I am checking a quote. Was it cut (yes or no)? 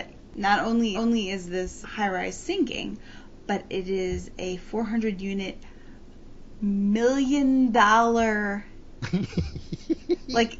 yes